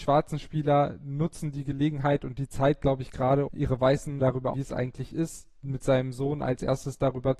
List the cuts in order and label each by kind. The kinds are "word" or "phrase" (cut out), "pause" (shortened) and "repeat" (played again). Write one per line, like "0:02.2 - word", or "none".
0:03.5 - word
0:04.2 - word
0:04.5 - word